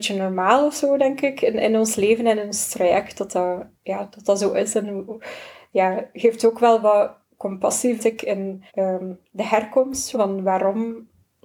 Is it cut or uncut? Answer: cut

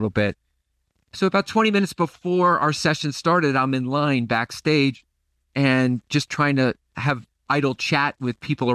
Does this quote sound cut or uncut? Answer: uncut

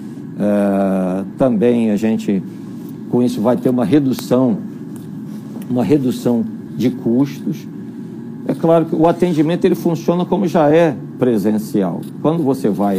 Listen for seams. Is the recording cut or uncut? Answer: uncut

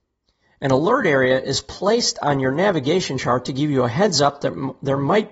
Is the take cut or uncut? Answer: uncut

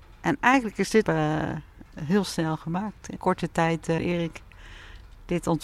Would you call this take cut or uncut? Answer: cut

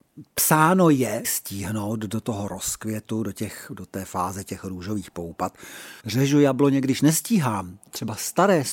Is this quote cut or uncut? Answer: cut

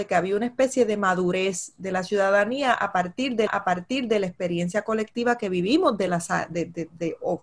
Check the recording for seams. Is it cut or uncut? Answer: cut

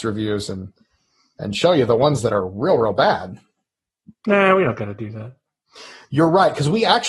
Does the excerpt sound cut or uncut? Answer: uncut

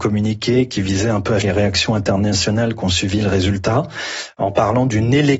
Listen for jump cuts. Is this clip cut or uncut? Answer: cut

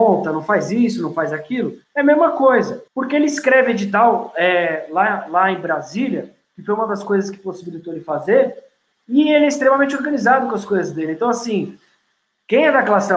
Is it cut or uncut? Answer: cut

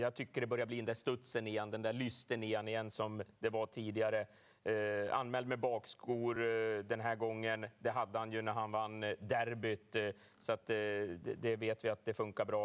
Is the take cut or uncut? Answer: uncut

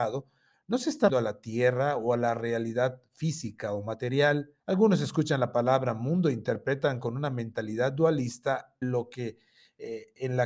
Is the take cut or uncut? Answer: cut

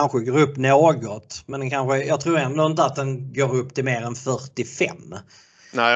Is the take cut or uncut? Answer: uncut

